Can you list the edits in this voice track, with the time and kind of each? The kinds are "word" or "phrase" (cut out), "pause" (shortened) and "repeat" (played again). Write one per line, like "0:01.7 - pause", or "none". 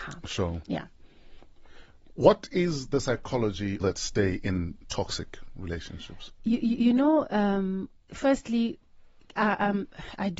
0:03.8 - phrase